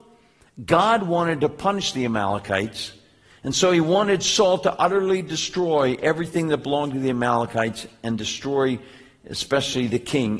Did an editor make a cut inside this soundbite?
no; 0 cuts

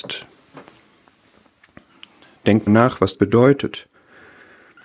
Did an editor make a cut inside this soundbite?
yes; 2 cuts; at 2.7 s, 3.1 s

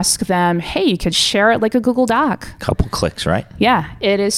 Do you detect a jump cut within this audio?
no; 0 cuts

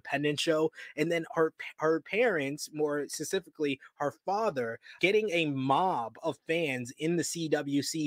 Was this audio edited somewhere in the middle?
yes; 1 cut; at 5.0 s

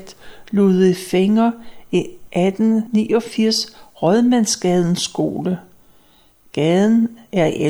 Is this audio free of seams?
yes; 0 cuts

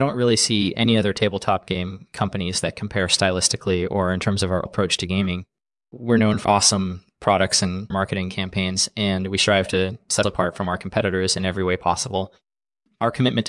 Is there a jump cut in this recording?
yes; 4 cuts; at 4.7 s, 6.4 s, 7.9 s, 10.2 s

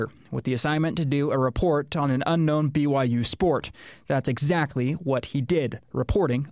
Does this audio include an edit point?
no; 0 cuts

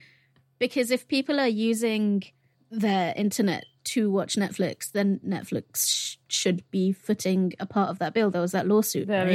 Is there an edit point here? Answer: yes; 2 cuts; at 2.5 s, 6.2 s

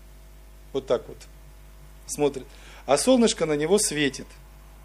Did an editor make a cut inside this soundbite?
no; 0 cuts

